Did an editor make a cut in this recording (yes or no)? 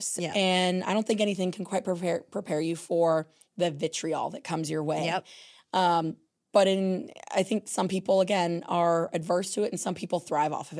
no